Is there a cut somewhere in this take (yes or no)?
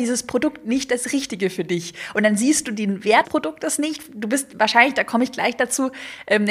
yes